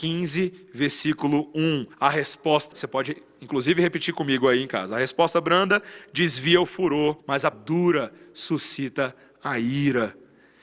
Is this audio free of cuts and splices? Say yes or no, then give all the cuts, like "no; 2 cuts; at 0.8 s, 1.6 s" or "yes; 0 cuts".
no; 4 cuts; at 1.9 s, 2.7 s, 7.2 s, 7.5 s